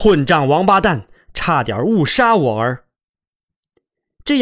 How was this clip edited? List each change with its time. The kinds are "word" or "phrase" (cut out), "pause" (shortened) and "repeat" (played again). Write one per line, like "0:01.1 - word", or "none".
none